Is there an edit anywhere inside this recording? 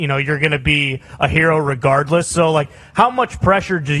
no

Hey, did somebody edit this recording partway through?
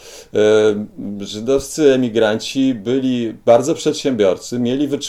no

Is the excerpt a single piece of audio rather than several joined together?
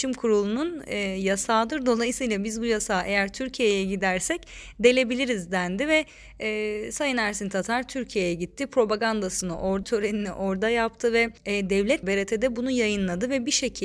no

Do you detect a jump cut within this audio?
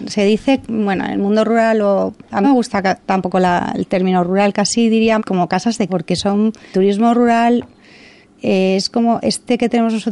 yes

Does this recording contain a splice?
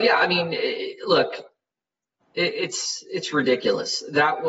no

